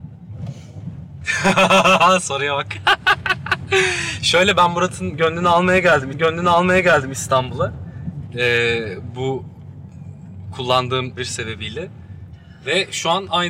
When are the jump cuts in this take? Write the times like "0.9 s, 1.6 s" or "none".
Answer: 6.1 s, 11.2 s